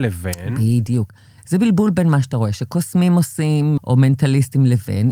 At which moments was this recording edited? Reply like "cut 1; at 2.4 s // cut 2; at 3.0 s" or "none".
cut 1; at 3.8 s